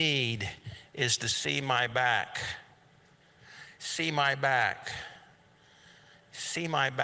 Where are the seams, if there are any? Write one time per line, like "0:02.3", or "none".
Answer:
none